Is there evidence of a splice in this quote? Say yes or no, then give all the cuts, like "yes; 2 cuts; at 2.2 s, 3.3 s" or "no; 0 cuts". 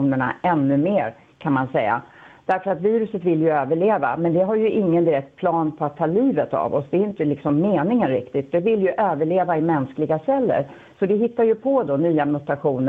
no; 0 cuts